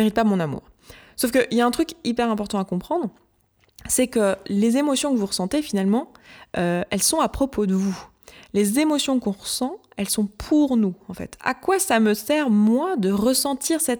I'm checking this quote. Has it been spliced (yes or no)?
no